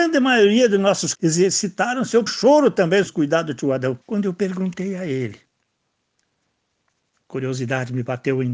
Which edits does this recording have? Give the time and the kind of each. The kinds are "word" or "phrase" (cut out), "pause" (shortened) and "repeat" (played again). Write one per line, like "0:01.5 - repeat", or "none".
0:01.1 - phrase
0:02.3 - word
0:03.1 - word
0:04.0 - pause